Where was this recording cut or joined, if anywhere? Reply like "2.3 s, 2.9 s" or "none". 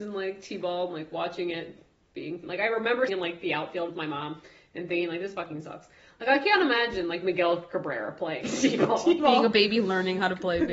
2.4 s, 3.1 s, 8.4 s